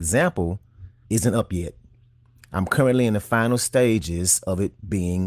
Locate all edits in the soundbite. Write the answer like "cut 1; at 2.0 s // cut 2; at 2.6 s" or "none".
cut 1; at 1.0 s